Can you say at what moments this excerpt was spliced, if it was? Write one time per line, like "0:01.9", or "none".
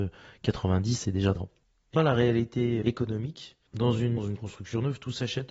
0:01.3
0:01.9
0:02.8
0:04.2